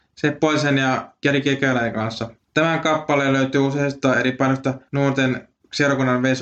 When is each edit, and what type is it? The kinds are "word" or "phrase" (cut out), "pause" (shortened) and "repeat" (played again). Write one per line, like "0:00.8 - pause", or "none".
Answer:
0:02.4 - pause
0:04.9 - pause